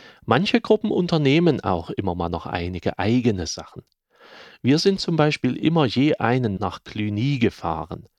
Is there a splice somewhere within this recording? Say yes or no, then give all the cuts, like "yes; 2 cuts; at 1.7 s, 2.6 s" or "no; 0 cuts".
yes; 1 cut; at 6.6 s